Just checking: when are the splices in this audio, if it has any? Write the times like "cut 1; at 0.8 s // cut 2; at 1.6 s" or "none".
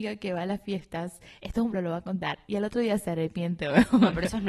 cut 1; at 1.7 s

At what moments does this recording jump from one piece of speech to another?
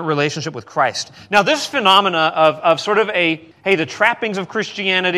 cut 1; at 3.5 s

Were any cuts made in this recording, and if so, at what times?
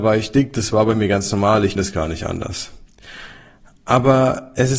cut 1; at 1.8 s

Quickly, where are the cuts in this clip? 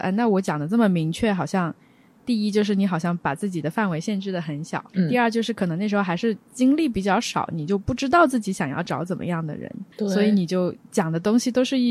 cut 1; at 4.9 s // cut 2; at 6.4 s // cut 3; at 9.9 s

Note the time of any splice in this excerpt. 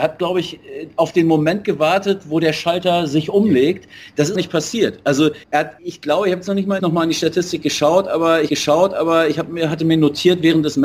cut 1; at 4.3 s // cut 2; at 5.4 s // cut 3; at 5.8 s // cut 4; at 6.8 s // cut 5; at 8.5 s

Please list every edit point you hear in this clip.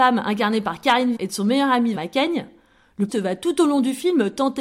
cut 1; at 1.2 s // cut 2; at 2.0 s // cut 3; at 3.1 s

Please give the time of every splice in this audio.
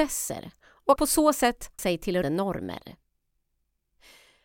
cut 1; at 1.0 s // cut 2; at 1.8 s // cut 3; at 2.2 s

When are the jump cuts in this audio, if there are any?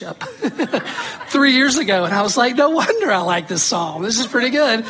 none

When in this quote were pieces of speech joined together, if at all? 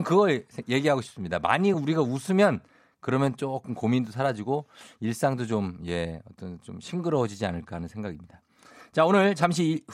none

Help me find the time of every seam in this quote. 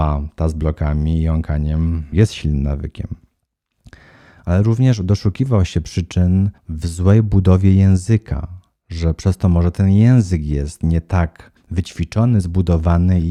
cut 1; at 2.1 s // cut 2; at 6.6 s // cut 3; at 8.7 s // cut 4; at 11.6 s

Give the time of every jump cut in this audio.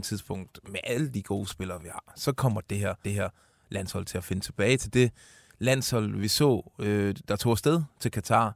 cut 1; at 3.0 s

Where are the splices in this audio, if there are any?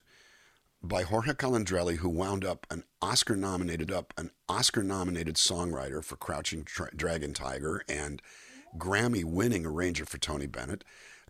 cut 1; at 3.9 s // cut 2; at 7.3 s

